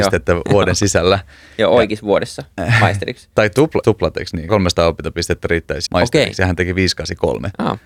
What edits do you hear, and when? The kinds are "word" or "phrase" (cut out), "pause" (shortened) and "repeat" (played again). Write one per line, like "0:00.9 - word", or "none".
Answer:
0:03.8 - word
0:04.5 - word
0:05.9 - word